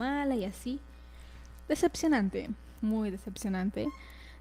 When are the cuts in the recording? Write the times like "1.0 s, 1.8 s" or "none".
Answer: 2.8 s